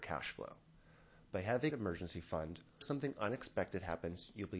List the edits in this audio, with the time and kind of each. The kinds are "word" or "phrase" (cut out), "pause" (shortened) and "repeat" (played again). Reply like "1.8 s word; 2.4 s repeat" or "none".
1.7 s phrase; 2.8 s word